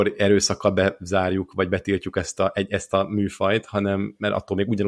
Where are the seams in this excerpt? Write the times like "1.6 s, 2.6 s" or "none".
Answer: none